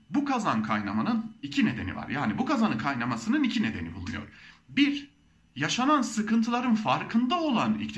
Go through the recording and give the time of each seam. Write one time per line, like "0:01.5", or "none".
none